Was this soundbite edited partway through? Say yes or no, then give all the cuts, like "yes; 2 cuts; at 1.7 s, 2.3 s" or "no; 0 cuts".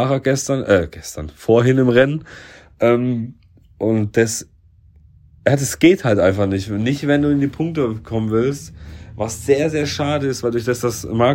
no; 0 cuts